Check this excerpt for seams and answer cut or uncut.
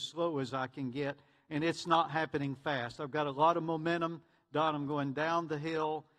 uncut